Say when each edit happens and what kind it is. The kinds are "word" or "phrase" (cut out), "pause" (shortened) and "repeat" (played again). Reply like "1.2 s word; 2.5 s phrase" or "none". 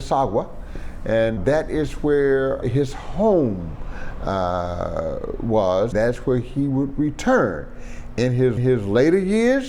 1.4 s word; 2.6 s word; 5.9 s word; 8.6 s repeat

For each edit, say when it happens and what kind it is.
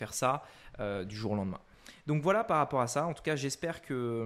none

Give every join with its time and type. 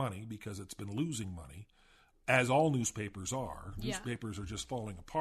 none

